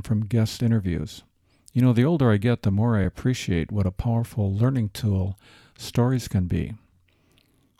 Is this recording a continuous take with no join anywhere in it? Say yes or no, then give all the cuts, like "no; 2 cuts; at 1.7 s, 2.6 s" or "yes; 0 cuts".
yes; 0 cuts